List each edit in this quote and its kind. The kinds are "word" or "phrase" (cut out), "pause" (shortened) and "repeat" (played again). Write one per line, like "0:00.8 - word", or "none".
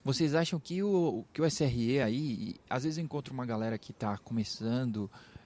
none